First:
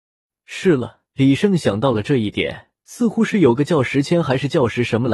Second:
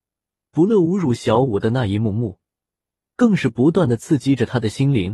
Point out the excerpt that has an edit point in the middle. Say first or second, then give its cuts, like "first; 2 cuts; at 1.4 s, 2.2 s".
first; 2 cuts; at 1.1 s, 2.8 s